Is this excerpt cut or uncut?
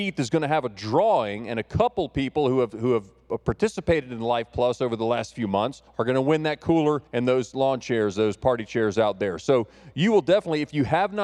cut